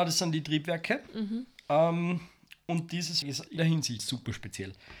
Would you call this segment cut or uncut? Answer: cut